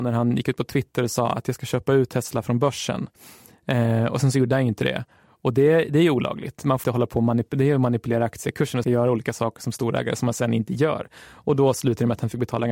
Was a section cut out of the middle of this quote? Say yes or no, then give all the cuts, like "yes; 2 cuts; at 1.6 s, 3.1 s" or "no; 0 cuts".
yes; 2 cuts; at 6.8 s, 8.8 s